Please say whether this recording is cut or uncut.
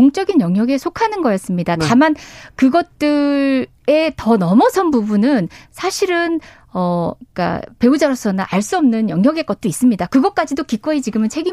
uncut